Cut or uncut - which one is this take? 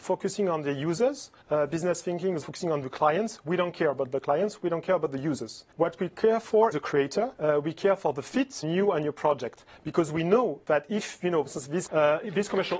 cut